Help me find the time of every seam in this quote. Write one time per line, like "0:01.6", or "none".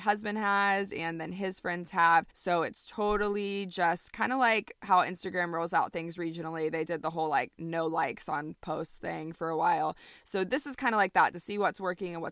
0:02.3